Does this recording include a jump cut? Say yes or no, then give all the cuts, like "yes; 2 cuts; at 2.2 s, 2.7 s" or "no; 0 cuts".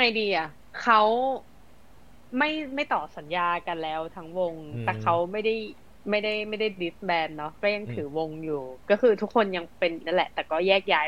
yes; 1 cut; at 10.0 s